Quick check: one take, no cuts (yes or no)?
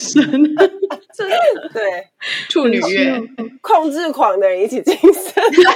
no